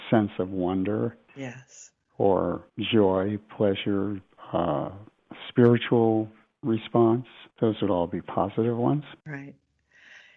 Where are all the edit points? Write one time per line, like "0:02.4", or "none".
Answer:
0:01.3
0:02.7
0:07.5
0:09.2

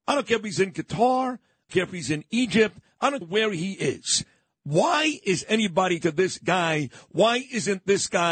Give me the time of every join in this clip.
0:01.7
0:03.2
0:06.0

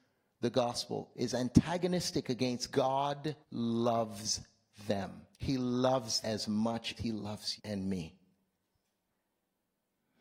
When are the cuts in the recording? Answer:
0:01.1
0:02.7
0:03.4
0:05.3
0:06.2
0:07.0
0:07.6

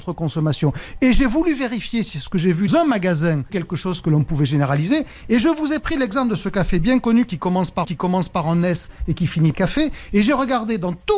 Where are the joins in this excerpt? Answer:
0:02.7
0:03.5
0:07.8
0:09.5

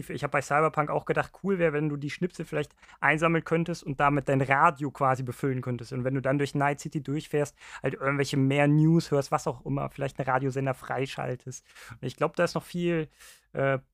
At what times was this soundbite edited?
none

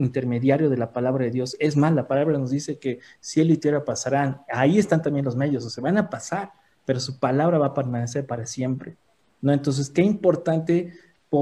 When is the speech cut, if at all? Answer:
none

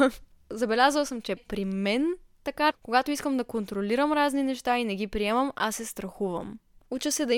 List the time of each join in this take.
0:01.4
0:02.7

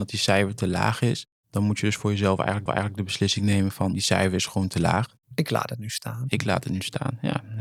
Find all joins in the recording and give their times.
0:01.3
0:02.7
0:03.9
0:05.2

